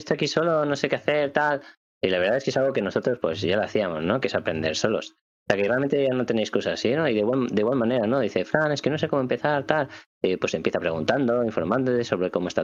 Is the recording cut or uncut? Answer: uncut